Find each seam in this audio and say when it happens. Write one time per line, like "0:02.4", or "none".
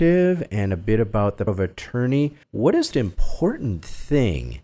0:01.5
0:02.4
0:02.9